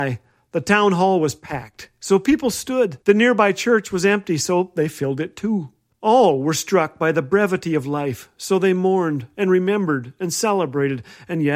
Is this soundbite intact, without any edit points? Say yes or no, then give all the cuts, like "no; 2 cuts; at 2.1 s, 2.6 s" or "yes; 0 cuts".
no; 2 cuts; at 3.0 s, 5.9 s